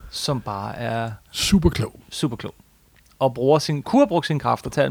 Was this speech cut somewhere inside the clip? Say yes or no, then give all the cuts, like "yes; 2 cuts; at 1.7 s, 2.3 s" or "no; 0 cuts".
no; 0 cuts